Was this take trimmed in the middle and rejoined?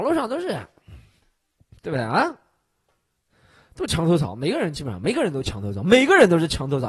no; 0 cuts

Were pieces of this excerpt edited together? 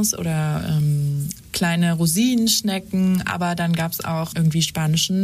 no; 0 cuts

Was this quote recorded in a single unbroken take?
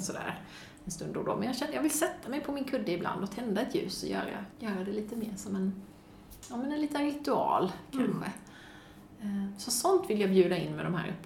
no; 1 cut; at 4.5 s

